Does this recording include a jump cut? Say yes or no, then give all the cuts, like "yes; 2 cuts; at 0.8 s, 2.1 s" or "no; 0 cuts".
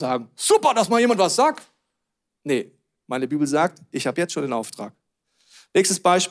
no; 0 cuts